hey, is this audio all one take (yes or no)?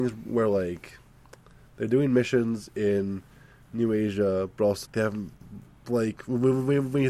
no